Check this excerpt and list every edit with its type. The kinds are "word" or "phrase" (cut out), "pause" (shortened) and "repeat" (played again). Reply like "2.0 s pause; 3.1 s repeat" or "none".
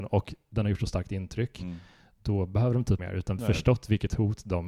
3.0 s phrase; 3.4 s phrase